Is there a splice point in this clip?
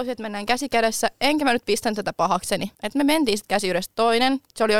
no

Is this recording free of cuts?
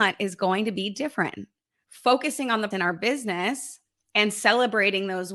no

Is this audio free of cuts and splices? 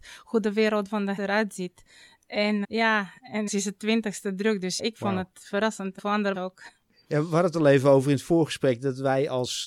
no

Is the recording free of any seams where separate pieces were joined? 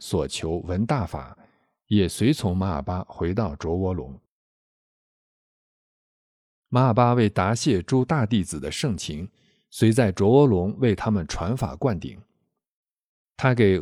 yes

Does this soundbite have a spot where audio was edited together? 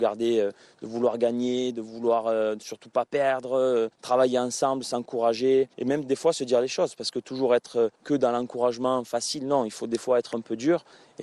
yes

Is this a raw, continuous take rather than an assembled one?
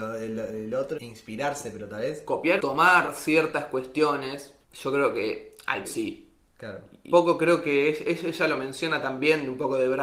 no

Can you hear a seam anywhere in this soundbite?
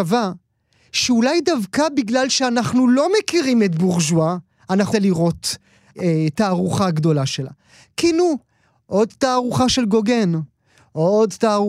yes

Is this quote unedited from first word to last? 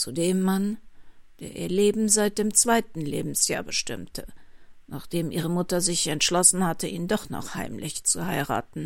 yes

